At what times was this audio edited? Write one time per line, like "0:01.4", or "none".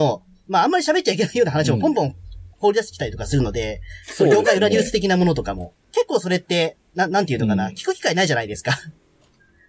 0:02.5
0:05.8